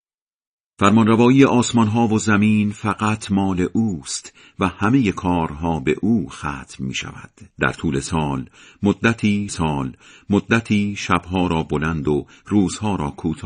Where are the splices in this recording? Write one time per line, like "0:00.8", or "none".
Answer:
0:07.5
0:09.5